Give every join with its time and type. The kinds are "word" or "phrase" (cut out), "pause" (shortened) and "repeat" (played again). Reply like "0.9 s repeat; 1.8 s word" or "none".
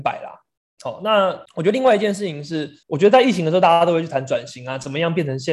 1.5 s pause; 2.8 s pause